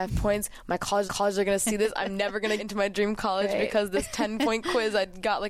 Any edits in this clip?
yes; 2 cuts; at 1.0 s, 2.6 s

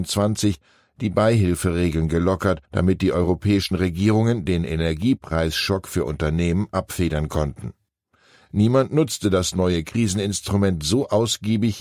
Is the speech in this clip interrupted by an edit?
yes; 1 cut; at 2.6 s

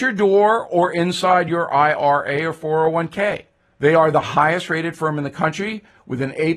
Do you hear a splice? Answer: no; 0 cuts

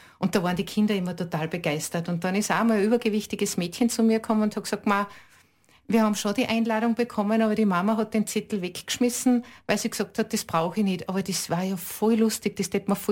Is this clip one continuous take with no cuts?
yes; 0 cuts

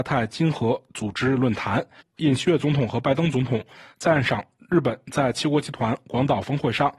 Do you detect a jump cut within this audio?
no; 0 cuts

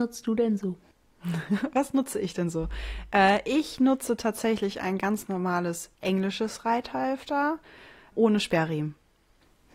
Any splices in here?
yes; 2 cuts; at 5.9 s, 8.1 s

